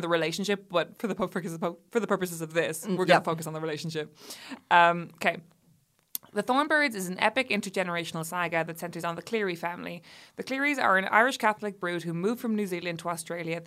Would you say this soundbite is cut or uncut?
uncut